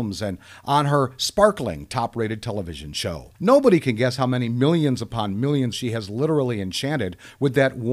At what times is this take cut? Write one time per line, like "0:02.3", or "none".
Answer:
0:03.4
0:05.7